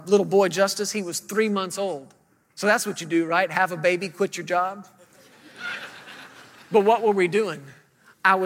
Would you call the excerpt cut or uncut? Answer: uncut